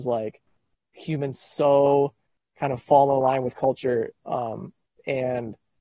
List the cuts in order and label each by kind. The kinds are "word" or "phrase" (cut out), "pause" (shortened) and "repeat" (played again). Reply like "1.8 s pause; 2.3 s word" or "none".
none